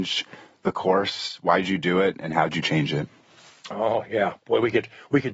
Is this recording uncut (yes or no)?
yes